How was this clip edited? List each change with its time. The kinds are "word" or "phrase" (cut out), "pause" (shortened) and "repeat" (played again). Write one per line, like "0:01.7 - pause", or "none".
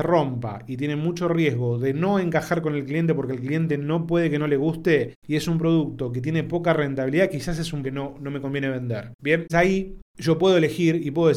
0:07.8 - word
0:09.5 - word